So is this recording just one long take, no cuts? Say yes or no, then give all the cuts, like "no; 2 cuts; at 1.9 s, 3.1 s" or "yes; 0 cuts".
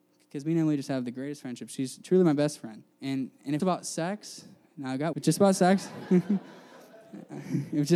no; 3 cuts; at 2.9 s, 3.6 s, 5.1 s